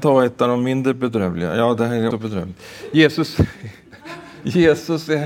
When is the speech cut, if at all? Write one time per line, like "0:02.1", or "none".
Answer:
0:02.1